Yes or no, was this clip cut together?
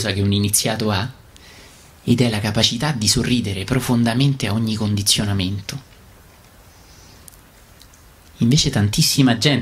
no